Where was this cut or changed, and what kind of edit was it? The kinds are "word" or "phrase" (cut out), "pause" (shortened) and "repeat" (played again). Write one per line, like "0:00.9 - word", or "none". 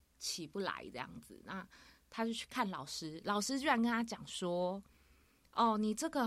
none